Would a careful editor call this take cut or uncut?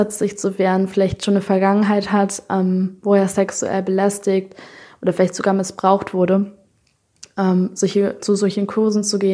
uncut